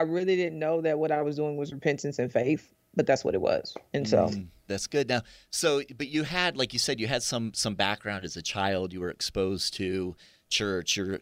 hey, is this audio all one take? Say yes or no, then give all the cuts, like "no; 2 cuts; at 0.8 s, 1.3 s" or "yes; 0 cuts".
yes; 0 cuts